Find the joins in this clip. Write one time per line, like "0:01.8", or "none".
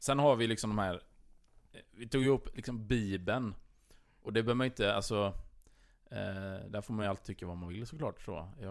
none